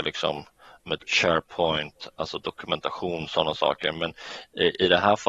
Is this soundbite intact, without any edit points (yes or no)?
no